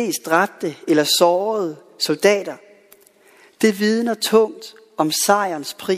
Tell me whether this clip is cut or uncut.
uncut